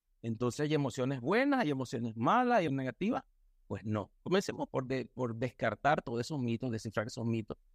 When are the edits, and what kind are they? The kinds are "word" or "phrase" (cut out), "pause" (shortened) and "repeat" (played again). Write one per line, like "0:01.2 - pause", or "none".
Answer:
0:02.7 - word
0:04.7 - word